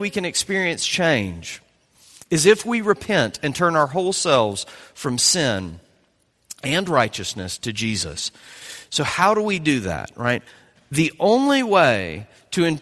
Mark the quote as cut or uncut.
uncut